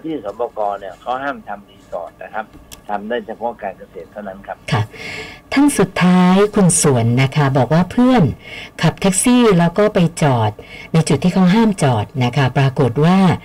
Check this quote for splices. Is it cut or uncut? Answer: cut